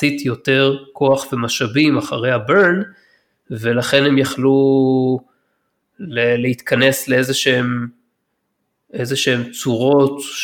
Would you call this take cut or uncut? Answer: uncut